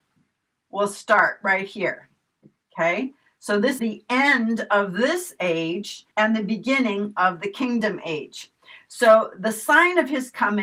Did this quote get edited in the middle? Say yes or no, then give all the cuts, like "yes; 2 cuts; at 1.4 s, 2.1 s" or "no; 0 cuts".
yes; 2 cuts; at 3.8 s, 6.1 s